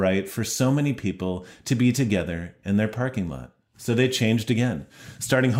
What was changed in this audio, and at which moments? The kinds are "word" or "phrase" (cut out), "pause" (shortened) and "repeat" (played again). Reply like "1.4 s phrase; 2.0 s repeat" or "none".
3.6 s pause